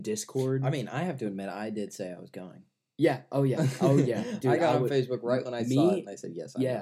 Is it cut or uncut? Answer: uncut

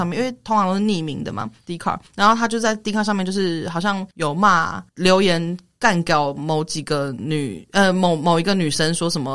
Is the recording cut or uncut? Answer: cut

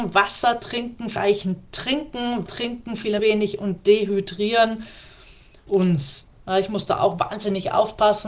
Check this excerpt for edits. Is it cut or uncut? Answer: cut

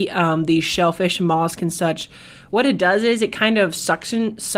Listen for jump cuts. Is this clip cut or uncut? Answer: uncut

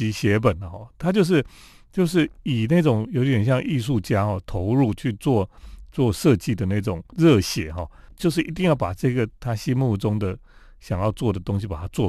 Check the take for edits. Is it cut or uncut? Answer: uncut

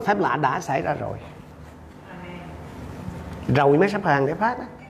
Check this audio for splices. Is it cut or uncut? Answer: uncut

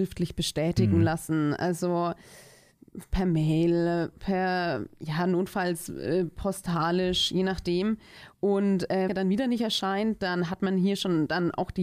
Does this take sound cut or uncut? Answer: cut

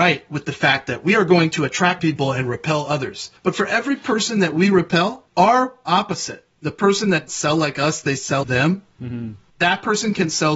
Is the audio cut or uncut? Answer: cut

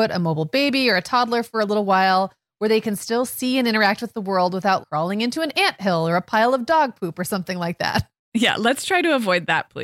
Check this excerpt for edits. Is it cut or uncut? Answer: cut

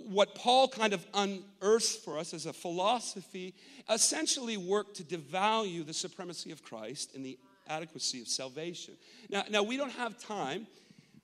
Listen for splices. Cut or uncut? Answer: uncut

